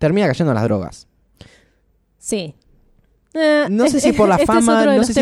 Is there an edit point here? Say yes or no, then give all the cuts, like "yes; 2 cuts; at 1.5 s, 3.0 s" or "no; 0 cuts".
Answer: no; 0 cuts